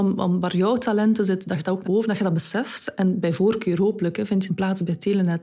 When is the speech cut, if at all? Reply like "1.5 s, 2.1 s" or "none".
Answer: 1.8 s, 4.5 s